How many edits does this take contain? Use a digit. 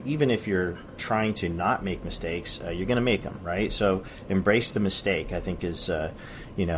0